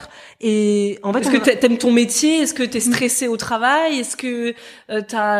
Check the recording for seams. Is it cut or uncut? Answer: uncut